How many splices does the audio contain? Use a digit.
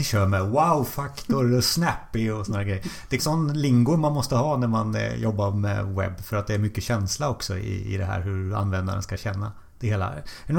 1